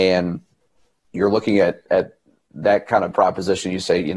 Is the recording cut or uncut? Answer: cut